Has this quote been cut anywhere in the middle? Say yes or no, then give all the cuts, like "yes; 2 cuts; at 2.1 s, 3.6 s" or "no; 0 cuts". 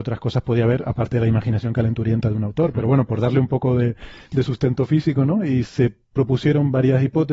no; 0 cuts